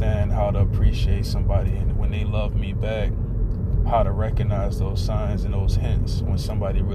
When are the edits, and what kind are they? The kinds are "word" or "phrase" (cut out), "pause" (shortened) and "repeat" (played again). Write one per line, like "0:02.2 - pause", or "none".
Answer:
none